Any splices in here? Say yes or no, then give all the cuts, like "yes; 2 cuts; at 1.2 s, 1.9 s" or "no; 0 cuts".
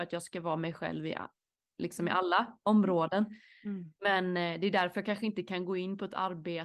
no; 0 cuts